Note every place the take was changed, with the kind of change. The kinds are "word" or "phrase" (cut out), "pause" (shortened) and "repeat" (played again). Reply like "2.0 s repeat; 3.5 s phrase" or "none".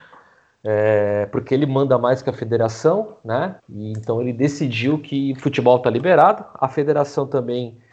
3.6 s pause